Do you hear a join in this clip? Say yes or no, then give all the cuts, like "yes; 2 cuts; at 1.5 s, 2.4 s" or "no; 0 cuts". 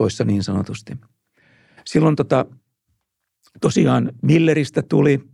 no; 0 cuts